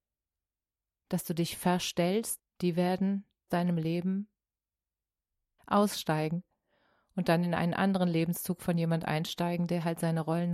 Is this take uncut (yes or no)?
no